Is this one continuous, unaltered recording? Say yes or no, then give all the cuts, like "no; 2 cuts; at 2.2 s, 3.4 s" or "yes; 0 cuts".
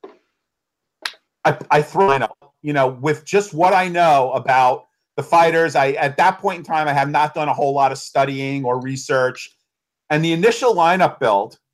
yes; 0 cuts